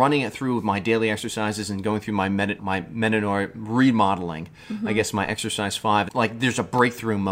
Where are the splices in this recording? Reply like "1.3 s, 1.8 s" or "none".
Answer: 2.6 s, 6.1 s